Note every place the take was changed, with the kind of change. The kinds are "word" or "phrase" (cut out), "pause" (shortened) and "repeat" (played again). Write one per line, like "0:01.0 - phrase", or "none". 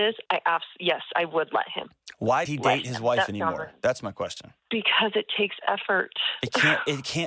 0:02.4 - word
0:04.6 - pause